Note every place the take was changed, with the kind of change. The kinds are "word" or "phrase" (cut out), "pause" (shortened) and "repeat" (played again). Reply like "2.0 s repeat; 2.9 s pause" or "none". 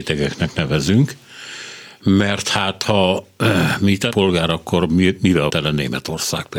4.1 s word; 5.5 s word